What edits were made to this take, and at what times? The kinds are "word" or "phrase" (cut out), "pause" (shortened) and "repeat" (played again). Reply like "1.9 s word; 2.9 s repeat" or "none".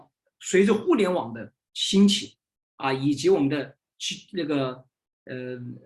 none